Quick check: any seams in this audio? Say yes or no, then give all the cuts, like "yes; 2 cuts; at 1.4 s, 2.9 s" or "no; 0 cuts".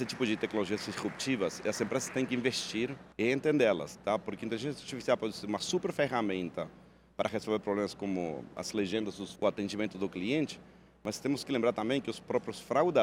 yes; 2 cuts; at 3.1 s, 9.4 s